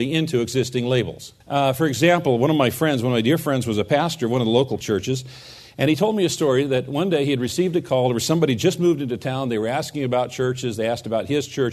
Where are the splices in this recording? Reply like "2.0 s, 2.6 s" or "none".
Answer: 1.4 s, 4.8 s